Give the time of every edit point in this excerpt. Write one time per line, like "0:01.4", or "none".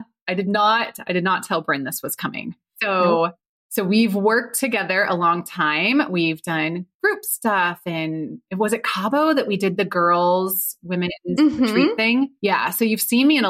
none